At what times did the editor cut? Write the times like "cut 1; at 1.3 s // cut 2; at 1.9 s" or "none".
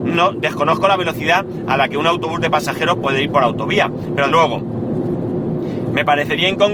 cut 1; at 4.3 s